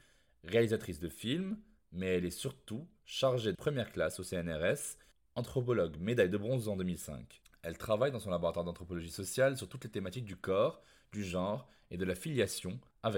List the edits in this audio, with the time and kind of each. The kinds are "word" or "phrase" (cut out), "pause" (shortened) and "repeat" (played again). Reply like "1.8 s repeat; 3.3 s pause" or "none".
3.5 s word